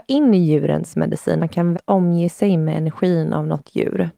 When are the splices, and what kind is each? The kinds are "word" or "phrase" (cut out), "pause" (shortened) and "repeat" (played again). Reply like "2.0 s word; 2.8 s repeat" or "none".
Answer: 1.4 s word; 1.7 s word